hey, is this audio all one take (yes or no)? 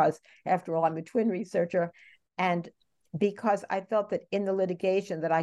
yes